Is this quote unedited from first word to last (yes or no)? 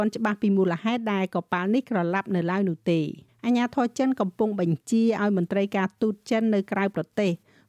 no